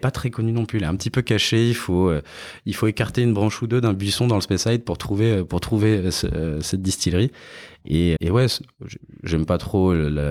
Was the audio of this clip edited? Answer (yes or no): yes